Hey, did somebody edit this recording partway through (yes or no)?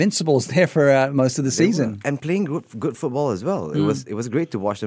no